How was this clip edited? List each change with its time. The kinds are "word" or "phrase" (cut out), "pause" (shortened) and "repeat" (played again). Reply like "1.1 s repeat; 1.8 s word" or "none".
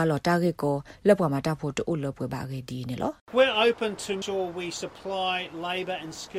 3.2 s pause; 4.2 s word